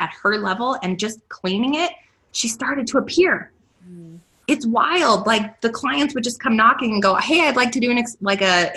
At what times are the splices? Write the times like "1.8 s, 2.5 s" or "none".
none